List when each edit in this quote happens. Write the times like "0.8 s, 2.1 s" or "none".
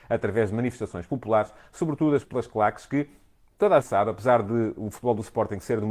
2.2 s, 3.8 s